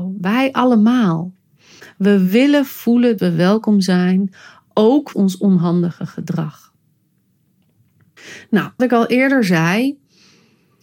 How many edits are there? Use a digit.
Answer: 3